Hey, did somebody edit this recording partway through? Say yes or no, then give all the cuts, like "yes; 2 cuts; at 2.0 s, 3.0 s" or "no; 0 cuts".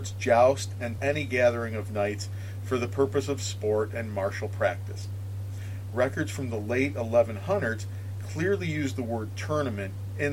yes; 1 cut; at 1.0 s